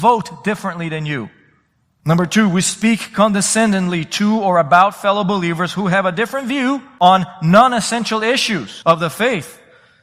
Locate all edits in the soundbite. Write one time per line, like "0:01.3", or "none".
none